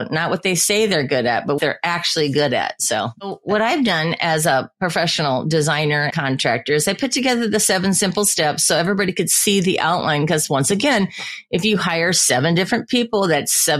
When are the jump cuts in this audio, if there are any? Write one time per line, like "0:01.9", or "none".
0:01.6
0:06.1